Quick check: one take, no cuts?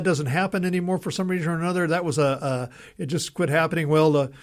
yes; 0 cuts

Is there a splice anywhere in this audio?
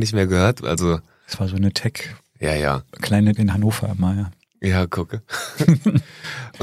yes; 1 cut; at 3.4 s

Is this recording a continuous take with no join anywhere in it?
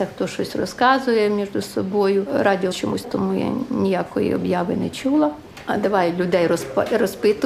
no; 2 cuts; at 2.7 s, 3.0 s

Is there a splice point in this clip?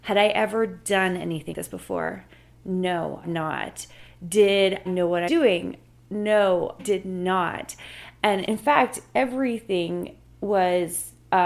yes; 6 cuts; at 1.5 s, 3.2 s, 4.9 s, 5.3 s, 6.8 s, 8.5 s

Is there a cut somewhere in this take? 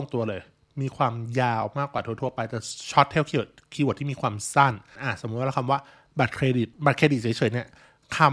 yes; 2 cuts; at 5.0 s, 6.7 s

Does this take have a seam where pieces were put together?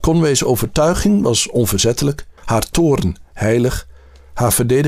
yes; 1 cut; at 2.4 s

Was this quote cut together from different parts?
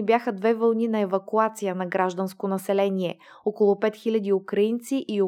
no; 0 cuts

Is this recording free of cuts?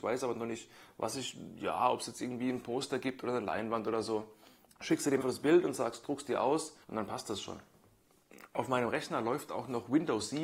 no; 3 cuts; at 4.7 s, 5.2 s, 6.8 s

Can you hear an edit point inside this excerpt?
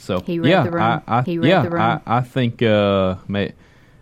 yes; 1 cut; at 1.2 s

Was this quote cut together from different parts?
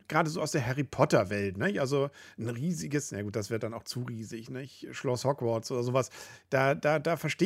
no; 0 cuts

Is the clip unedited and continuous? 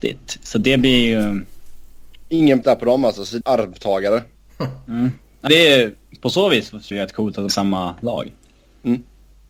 no; 5 cuts; at 2.6 s, 3.4 s, 5.5 s, 6.9 s, 7.5 s

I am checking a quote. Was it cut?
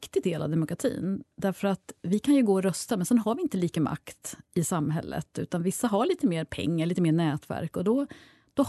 yes; 2 cuts; at 3.8 s, 4.4 s

